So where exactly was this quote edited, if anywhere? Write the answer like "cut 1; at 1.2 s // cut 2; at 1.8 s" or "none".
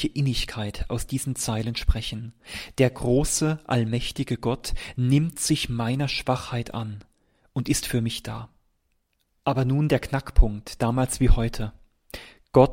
none

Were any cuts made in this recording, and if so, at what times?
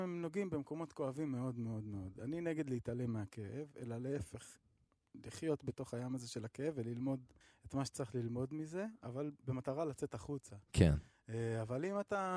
cut 1; at 7.4 s

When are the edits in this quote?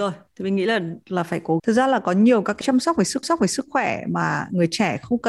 cut 1; at 1.6 s // cut 2; at 2.6 s // cut 3; at 3.2 s

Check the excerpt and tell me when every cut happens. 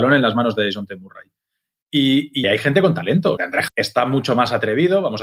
cut 1; at 2.4 s // cut 2; at 3.4 s // cut 3; at 3.7 s

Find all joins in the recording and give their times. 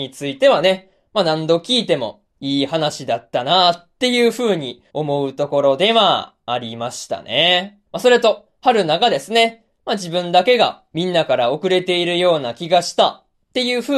cut 1; at 4.9 s // cut 2; at 7.9 s

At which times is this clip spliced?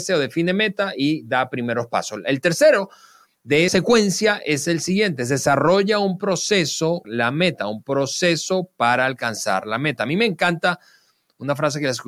cut 1; at 3.7 s // cut 2; at 7.0 s

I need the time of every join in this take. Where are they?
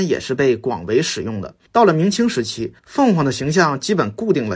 cut 1; at 1.7 s // cut 2; at 2.8 s

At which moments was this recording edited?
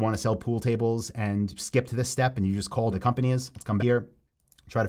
cut 1; at 1.6 s // cut 2; at 2.9 s // cut 3; at 3.8 s

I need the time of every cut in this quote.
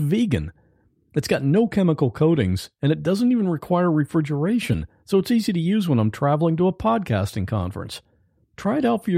none

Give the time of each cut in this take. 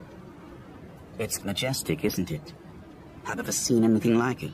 cut 1; at 1.4 s // cut 2; at 3.4 s

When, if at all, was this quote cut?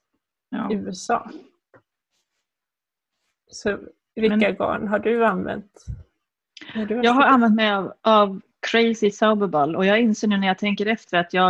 none

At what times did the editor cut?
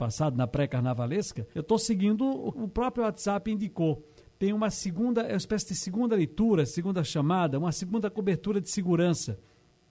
cut 1; at 1.5 s // cut 2; at 2.5 s

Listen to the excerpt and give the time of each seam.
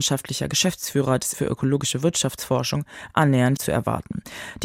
cut 1; at 1.3 s // cut 2; at 3.6 s

